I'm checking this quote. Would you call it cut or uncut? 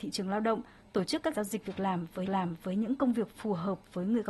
cut